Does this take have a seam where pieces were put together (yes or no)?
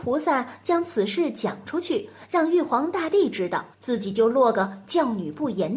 yes